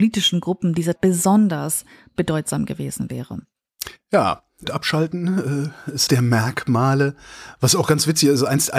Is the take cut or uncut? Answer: cut